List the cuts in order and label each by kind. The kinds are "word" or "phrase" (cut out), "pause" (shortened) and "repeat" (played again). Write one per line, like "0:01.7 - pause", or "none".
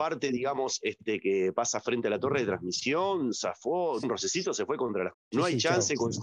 0:04.0 - word
0:05.1 - word